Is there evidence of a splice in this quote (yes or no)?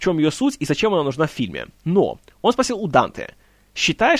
no